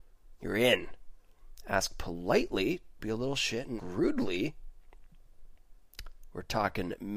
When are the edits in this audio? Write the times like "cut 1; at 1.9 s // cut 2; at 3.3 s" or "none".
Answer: cut 1; at 3.0 s // cut 2; at 3.8 s